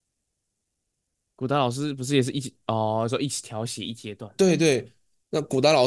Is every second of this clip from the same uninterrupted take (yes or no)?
yes